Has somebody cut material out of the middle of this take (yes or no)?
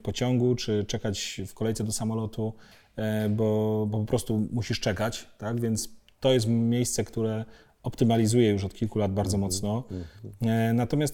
no